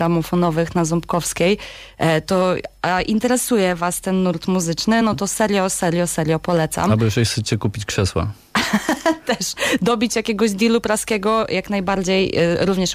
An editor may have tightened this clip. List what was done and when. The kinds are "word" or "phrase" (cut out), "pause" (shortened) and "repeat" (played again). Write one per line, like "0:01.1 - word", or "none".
none